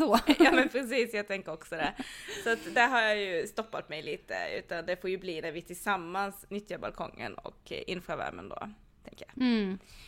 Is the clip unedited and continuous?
yes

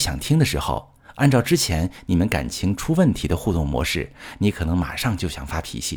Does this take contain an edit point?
no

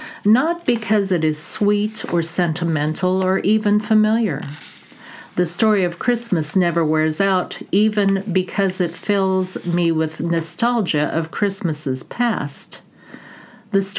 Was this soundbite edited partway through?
no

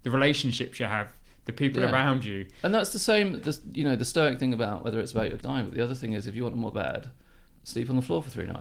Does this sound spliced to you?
yes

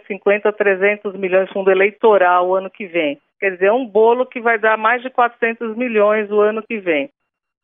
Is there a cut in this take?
yes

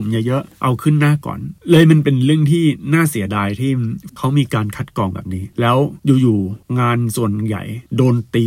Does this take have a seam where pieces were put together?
yes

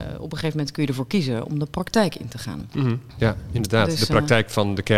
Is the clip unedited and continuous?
no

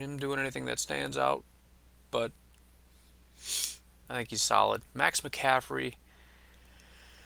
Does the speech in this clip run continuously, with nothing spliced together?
yes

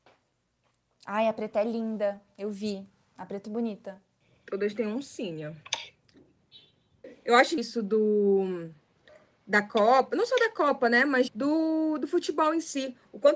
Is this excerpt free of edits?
no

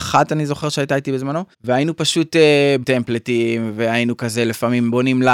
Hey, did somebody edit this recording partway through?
yes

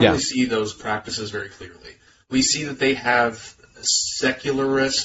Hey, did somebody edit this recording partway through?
no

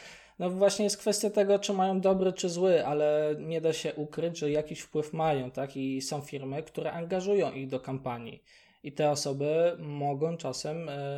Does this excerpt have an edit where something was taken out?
no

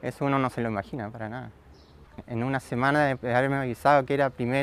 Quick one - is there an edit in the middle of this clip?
no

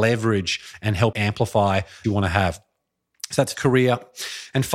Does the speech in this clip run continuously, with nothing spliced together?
no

